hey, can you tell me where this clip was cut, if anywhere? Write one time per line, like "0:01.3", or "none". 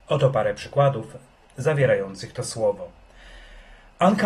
none